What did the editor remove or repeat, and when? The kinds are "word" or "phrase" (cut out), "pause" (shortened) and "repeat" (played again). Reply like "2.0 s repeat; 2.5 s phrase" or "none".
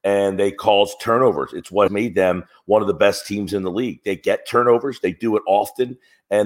1.9 s word

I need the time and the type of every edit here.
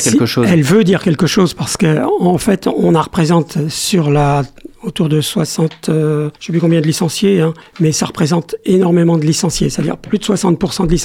3.0 s phrase; 6.4 s pause; 7.6 s pause

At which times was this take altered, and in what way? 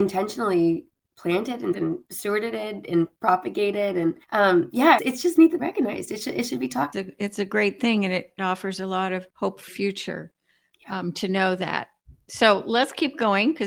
1.7 s word; 4.2 s pause; 5.0 s word; 5.6 s phrase; 6.9 s phrase; 8.4 s phrase; 9.3 s pause; 9.7 s word

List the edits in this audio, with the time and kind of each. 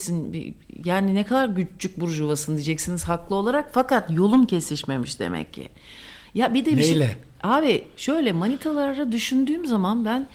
none

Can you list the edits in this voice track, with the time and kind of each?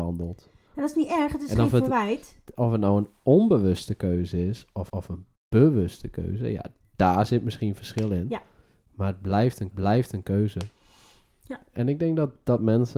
4.9 s repeat; 9.7 s repeat

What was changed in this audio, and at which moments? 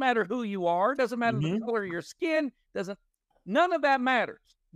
none

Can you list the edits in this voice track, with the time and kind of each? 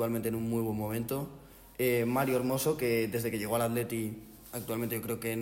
1.7 s pause

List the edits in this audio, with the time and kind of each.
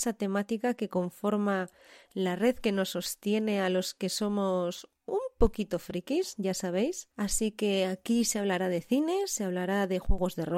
7.1 s pause

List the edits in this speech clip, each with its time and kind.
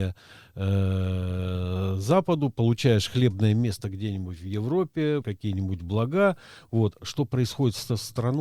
5.2 s word

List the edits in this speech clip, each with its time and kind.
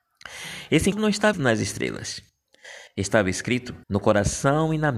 0.9 s word; 1.3 s word; 3.8 s pause

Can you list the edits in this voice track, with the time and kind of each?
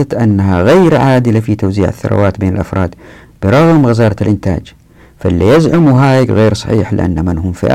none

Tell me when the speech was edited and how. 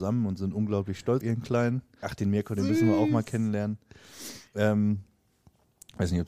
1.2 s word; 2.0 s phrase; 4.5 s pause

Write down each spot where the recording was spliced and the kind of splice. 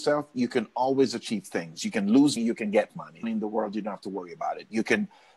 2.4 s word; 2.9 s word; 3.2 s phrase

